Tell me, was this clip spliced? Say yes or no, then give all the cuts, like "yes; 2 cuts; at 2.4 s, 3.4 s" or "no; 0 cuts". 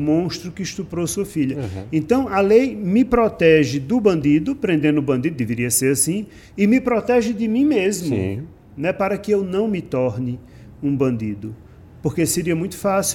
no; 0 cuts